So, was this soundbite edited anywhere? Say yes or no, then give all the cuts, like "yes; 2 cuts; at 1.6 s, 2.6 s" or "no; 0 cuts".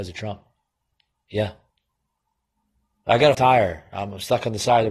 yes; 1 cut; at 3.3 s